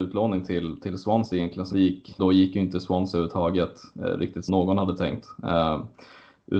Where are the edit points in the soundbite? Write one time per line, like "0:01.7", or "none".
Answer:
0:01.7
0:02.2
0:04.5